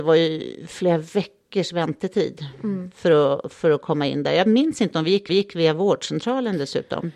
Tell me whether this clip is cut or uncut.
cut